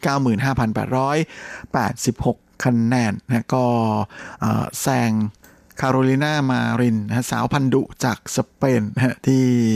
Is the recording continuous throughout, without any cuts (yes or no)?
yes